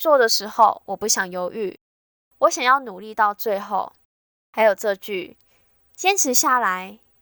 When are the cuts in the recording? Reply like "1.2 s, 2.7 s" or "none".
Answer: none